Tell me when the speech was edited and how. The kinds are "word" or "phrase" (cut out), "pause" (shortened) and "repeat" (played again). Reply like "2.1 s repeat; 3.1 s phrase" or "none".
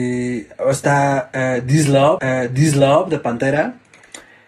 2.2 s repeat